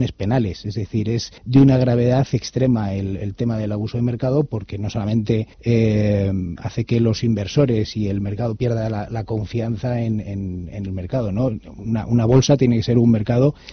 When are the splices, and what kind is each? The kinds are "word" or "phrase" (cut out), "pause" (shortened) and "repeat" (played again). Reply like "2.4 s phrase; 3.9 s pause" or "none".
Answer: 1.4 s pause; 5.5 s pause